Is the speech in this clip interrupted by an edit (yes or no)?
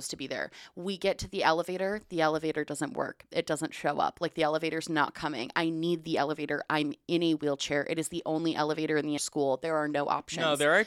yes